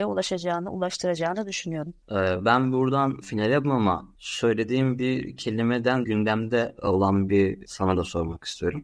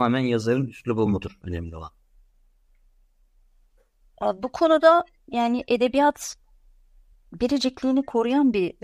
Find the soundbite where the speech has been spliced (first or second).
first